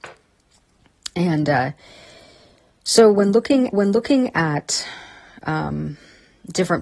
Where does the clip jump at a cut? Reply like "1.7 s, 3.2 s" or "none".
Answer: 3.7 s

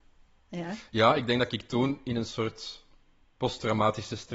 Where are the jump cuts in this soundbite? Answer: none

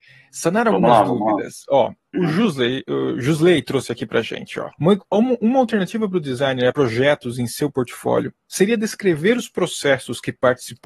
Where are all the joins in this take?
2.1 s, 4.7 s, 6.7 s

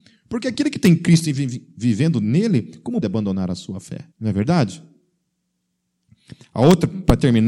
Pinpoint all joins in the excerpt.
3.0 s, 4.1 s

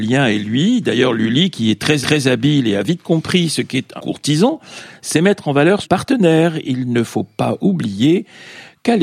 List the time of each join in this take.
2.0 s, 4.0 s, 5.8 s

